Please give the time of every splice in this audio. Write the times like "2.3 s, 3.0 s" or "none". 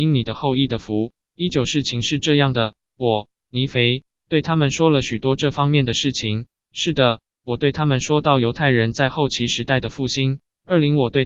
none